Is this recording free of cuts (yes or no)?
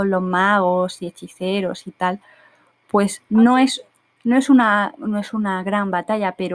yes